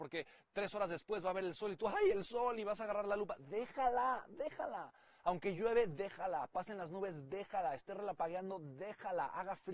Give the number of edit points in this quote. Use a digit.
0